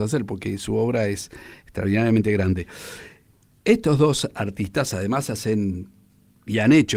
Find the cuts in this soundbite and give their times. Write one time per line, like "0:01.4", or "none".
none